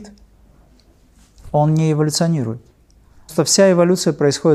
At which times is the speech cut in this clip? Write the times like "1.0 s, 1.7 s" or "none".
3.3 s